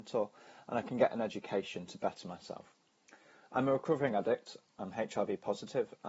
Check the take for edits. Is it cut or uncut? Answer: uncut